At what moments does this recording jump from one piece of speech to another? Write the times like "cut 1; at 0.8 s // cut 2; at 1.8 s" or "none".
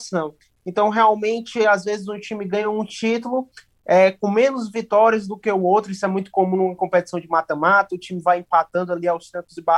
none